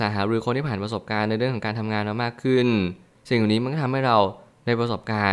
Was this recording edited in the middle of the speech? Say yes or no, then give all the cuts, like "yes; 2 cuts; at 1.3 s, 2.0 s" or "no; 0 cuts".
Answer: no; 0 cuts